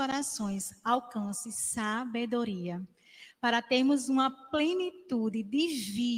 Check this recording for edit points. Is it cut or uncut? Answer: uncut